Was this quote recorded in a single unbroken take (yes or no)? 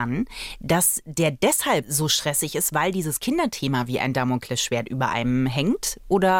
yes